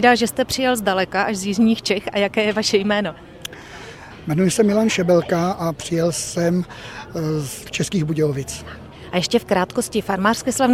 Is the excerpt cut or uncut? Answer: cut